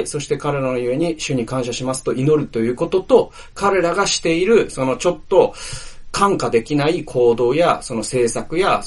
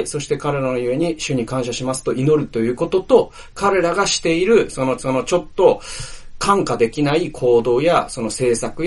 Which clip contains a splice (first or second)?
second